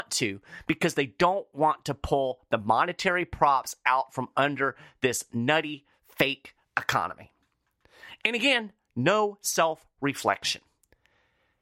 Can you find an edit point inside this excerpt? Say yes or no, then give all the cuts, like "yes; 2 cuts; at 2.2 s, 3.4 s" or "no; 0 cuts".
no; 0 cuts